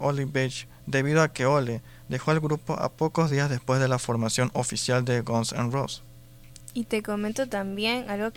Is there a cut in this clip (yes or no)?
no